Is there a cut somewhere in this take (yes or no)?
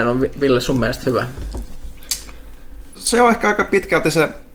no